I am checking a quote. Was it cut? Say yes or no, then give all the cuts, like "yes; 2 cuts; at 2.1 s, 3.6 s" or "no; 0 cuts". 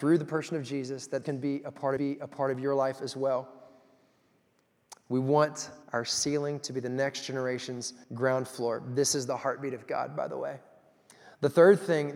yes; 4 cuts; at 1.2 s, 2.0 s, 5.8 s, 8.0 s